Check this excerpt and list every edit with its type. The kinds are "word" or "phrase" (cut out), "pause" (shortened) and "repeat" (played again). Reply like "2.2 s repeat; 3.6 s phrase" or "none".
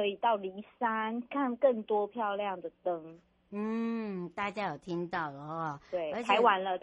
none